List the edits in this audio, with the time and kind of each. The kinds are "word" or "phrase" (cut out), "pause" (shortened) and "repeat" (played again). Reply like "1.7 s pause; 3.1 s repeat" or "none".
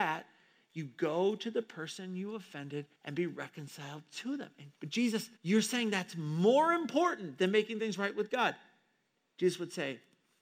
2.9 s pause; 4.7 s pause; 5.4 s pause